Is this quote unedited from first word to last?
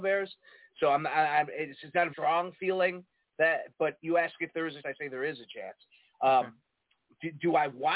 no; 2 cuts; at 2.1 s, 4.8 s

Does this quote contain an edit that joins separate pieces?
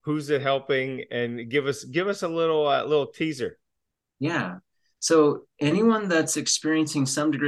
no; 0 cuts

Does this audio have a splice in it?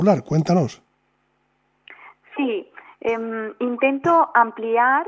no; 0 cuts

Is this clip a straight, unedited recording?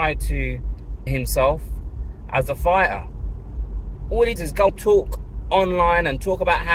no; 3 cuts; at 1.1 s, 4.4 s, 4.7 s

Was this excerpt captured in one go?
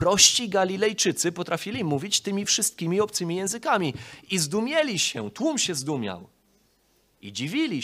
yes; 0 cuts

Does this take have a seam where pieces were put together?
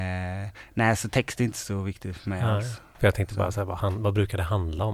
no; 0 cuts

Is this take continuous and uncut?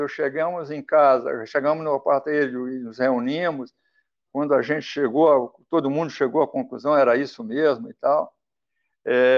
yes; 0 cuts

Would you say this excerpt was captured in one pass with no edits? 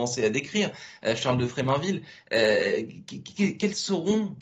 yes; 0 cuts

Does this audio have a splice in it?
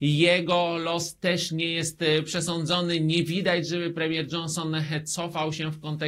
no; 0 cuts

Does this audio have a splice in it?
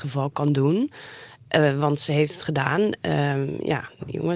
no; 0 cuts

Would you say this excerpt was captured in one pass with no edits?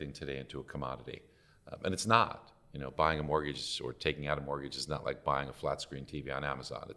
yes; 0 cuts

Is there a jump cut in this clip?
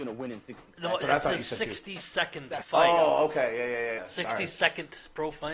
yes; 2 cuts; at 1.0 s, 4.0 s

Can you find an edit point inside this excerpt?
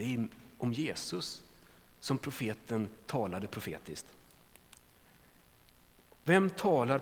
no; 0 cuts

